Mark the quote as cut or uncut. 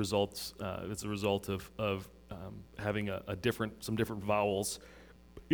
cut